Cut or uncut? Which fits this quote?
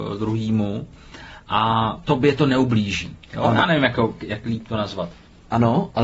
cut